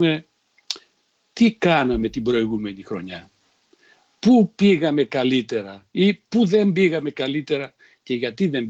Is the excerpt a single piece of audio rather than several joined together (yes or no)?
yes